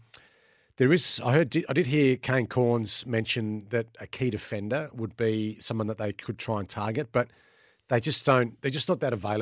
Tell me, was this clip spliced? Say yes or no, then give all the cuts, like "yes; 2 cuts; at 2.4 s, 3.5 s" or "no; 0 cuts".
no; 0 cuts